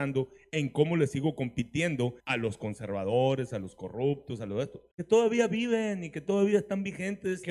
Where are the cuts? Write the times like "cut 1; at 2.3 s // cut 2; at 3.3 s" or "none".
cut 1; at 2.2 s // cut 2; at 4.9 s